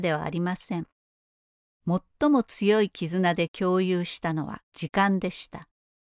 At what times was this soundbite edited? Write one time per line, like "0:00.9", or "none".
0:04.6